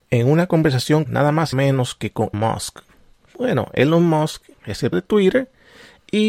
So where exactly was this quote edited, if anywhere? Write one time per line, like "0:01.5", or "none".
0:01.1
0:01.5
0:02.3
0:04.9